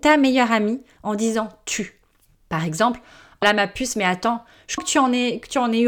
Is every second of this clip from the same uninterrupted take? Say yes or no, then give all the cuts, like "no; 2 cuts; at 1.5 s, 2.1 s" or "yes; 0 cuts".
no; 2 cuts; at 3.4 s, 4.8 s